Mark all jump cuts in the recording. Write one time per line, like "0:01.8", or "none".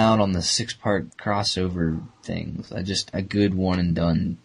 0:01.1
0:03.1